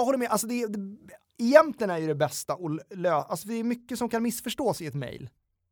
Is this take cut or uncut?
uncut